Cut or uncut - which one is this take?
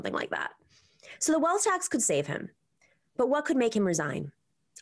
uncut